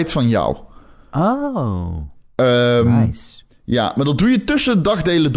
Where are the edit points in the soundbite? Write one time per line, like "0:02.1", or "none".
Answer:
none